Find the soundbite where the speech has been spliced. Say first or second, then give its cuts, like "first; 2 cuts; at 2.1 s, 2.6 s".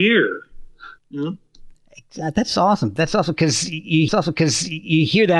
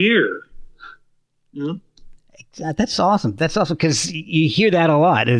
first; 2 cuts; at 1.0 s, 4.1 s